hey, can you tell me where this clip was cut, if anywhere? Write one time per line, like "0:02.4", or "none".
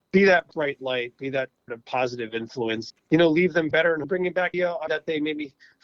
0:01.7
0:02.9
0:03.7
0:04.0
0:04.5
0:04.9